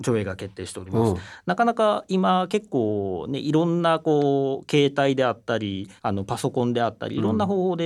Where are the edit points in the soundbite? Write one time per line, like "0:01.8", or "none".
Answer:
0:06.0